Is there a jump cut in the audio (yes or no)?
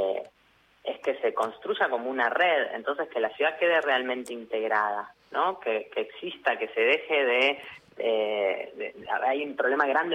yes